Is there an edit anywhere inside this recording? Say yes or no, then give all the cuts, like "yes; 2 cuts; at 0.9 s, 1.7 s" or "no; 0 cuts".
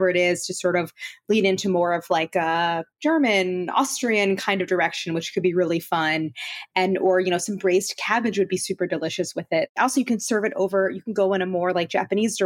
yes; 1 cut; at 2.9 s